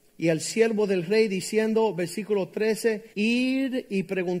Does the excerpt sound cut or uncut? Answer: cut